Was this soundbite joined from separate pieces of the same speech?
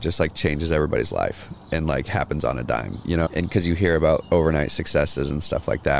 yes; 1 cut; at 3.3 s

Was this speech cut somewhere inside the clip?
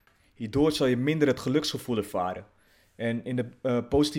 no; 0 cuts

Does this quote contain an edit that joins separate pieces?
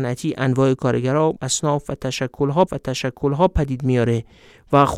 yes; 2 cuts; at 1.4 s, 2.7 s

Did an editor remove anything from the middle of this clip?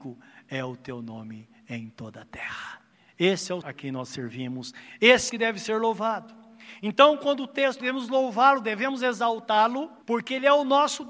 yes; 5 cuts; at 2.9 s, 3.6 s, 5.3 s, 7.8 s, 10.0 s

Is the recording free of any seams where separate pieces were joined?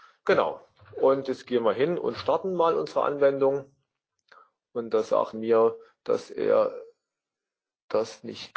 no; 1 cut; at 5.3 s

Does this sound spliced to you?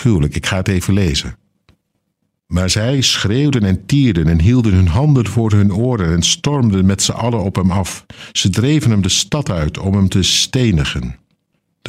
no; 0 cuts

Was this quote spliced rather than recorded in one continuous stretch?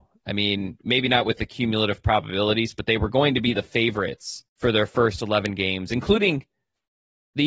yes; 1 cut; at 4.5 s

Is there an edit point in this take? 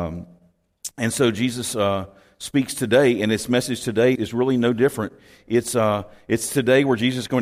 yes; 1 cut; at 4.1 s

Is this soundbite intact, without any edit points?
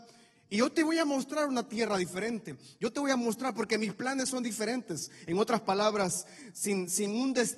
yes; 0 cuts

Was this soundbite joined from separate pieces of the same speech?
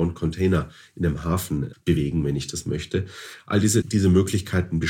yes; 2 cuts; at 1.7 s, 3.8 s

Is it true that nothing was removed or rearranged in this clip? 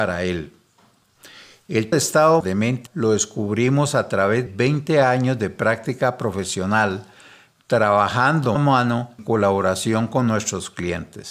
no; 6 cuts; at 1.9 s, 2.4 s, 2.9 s, 4.5 s, 8.6 s, 9.2 s

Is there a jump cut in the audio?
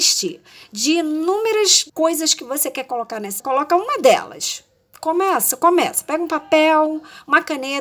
yes; 2 cuts; at 1.9 s, 3.4 s

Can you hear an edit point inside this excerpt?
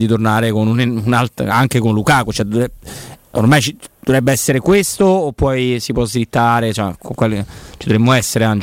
no; 0 cuts

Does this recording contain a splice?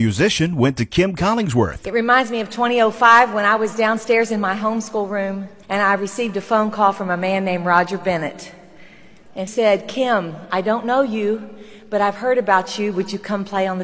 yes; 2 cuts; at 5.6 s, 9.5 s

